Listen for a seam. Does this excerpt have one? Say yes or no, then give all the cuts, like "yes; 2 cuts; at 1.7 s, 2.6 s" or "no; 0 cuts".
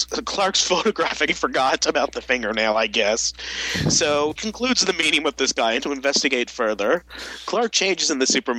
yes; 3 cuts; at 1.3 s, 4.4 s, 5.8 s